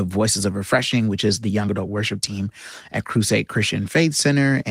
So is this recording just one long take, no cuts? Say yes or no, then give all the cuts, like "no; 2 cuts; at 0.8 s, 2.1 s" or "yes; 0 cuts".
yes; 0 cuts